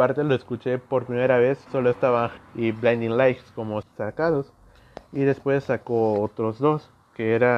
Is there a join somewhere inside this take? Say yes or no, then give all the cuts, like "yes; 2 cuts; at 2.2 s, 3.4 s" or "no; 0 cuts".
yes; 3 cuts; at 1.7 s, 2.4 s, 3.8 s